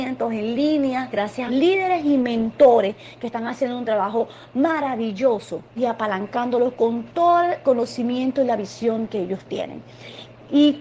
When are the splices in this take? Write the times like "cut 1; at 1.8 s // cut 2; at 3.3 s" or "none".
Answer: cut 1; at 1.5 s // cut 2; at 5.8 s

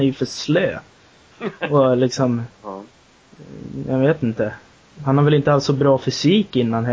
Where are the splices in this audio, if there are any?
none

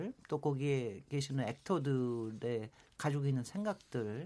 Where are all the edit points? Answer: none

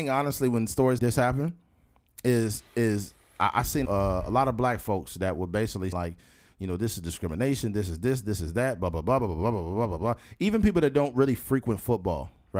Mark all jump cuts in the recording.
cut 1; at 1.0 s // cut 2; at 2.7 s // cut 3; at 3.9 s // cut 4; at 5.9 s

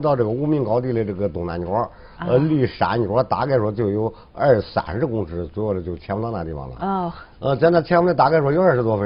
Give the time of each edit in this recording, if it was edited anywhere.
cut 1; at 7.3 s

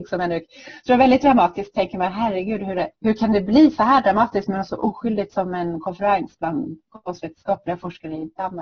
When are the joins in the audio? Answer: cut 1; at 2.9 s

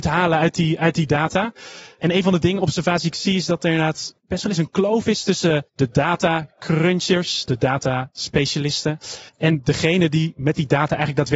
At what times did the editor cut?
cut 1; at 4.2 s // cut 2; at 5.7 s // cut 3; at 9.3 s

